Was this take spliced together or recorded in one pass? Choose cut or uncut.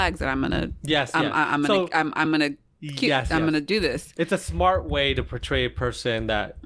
uncut